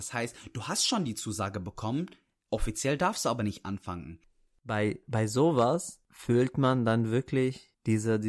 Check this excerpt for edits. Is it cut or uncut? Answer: uncut